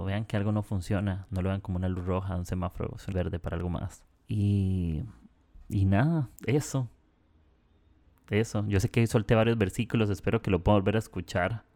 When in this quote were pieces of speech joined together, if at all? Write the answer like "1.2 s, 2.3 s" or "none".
3.1 s, 4.1 s, 6.4 s